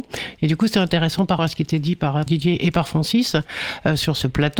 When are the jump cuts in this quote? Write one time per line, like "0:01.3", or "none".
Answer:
0:01.4
0:02.3